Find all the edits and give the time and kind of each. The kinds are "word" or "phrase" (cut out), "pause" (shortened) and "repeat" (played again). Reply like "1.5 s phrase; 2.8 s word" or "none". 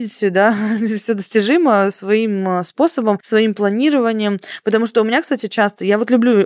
none